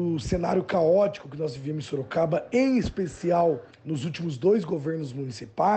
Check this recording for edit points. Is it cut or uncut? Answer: cut